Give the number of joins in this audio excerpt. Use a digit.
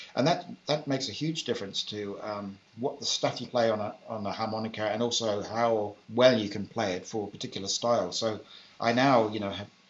3